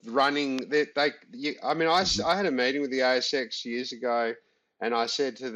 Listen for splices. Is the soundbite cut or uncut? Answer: uncut